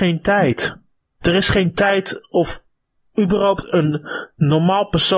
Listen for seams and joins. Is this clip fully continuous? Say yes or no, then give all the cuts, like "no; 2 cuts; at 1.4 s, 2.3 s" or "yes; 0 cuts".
yes; 0 cuts